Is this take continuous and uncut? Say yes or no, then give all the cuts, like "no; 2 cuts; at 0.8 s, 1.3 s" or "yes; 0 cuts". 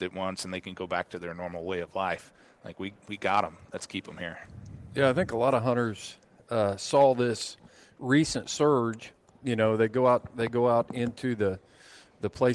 yes; 0 cuts